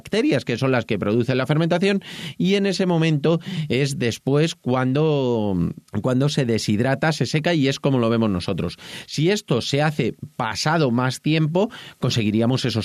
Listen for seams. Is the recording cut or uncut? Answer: cut